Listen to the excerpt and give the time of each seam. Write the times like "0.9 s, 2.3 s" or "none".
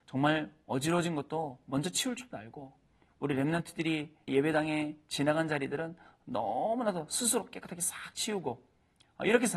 4.3 s